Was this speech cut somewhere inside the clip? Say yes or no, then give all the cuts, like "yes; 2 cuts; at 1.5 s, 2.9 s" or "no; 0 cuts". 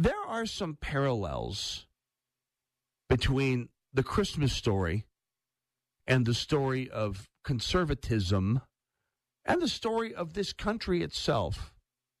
no; 0 cuts